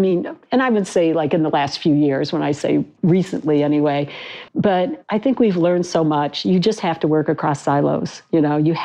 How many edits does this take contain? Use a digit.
1